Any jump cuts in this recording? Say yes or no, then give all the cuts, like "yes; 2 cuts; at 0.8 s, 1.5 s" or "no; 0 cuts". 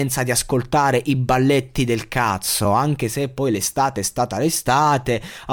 no; 0 cuts